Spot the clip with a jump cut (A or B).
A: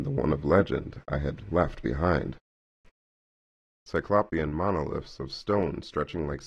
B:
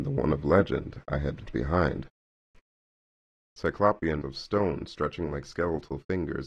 B